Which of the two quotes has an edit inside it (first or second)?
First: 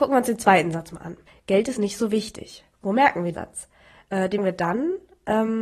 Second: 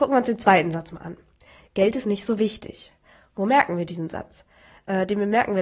first